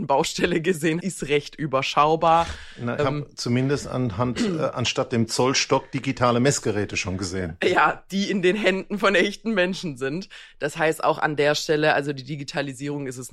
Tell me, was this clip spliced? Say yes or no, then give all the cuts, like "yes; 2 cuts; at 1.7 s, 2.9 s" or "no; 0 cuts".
yes; 2 cuts; at 1.0 s, 3.0 s